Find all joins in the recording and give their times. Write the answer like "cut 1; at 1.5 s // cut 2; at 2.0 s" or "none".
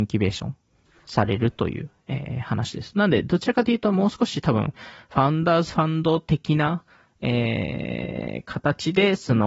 none